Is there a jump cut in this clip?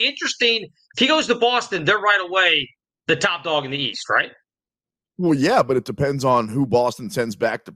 no; 0 cuts

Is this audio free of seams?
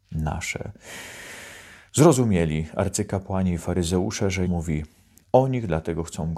no; 2 cuts; at 1.9 s, 4.4 s

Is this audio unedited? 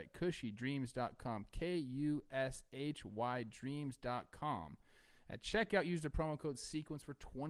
yes; 0 cuts

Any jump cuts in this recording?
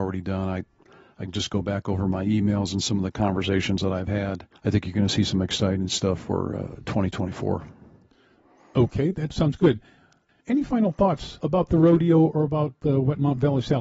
yes; 1 cut; at 4.6 s

